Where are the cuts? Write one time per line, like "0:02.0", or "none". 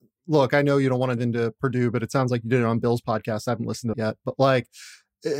0:01.2
0:03.9